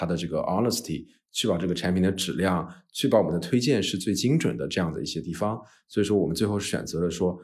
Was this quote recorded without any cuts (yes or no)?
yes